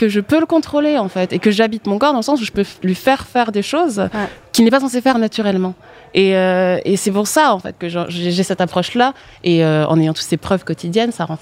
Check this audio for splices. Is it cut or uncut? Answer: uncut